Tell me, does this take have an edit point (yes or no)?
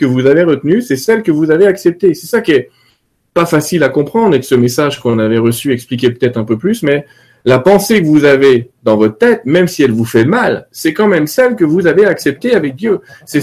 no